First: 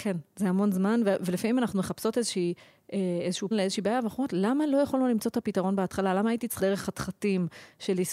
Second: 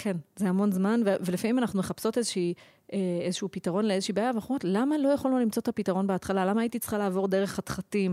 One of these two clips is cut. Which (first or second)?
first